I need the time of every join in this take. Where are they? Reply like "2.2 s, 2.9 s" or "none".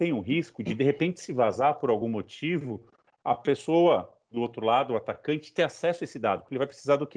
none